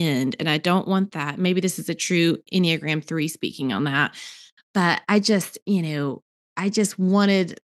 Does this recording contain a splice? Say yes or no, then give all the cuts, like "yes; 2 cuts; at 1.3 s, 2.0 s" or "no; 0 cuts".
no; 0 cuts